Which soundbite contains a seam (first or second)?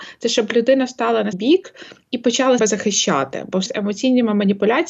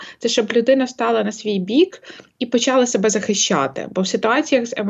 first